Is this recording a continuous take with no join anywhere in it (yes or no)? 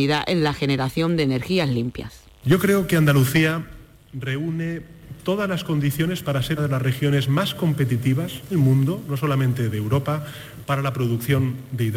no